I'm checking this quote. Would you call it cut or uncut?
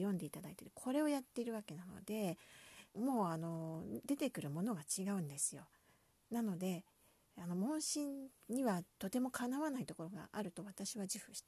cut